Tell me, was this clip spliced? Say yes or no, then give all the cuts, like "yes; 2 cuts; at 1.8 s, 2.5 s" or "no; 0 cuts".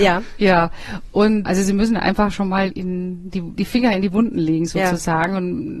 yes; 3 cuts; at 1.4 s, 2.7 s, 3.6 s